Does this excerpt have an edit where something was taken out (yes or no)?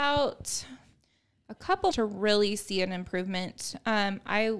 yes